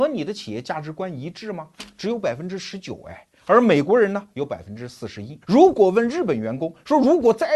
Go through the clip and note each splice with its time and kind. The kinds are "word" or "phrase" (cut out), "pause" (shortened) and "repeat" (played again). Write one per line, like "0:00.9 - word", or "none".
0:05.4 - pause